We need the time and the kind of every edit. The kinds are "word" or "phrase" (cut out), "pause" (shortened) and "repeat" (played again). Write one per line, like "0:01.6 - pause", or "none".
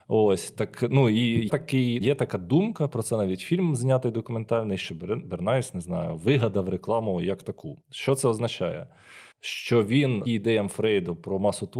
0:01.5 - word
0:02.0 - word
0:04.9 - phrase
0:07.8 - pause
0:09.3 - pause
0:10.3 - word